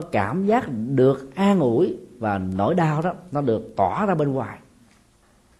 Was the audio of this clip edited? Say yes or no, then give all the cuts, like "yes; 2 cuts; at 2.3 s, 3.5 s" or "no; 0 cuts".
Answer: no; 0 cuts